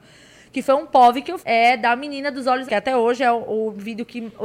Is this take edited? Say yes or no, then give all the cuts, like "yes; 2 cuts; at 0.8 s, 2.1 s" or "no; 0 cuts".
yes; 2 cuts; at 1.4 s, 2.7 s